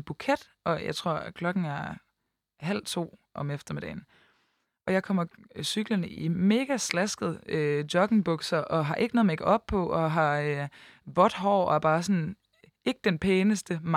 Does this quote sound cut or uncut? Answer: uncut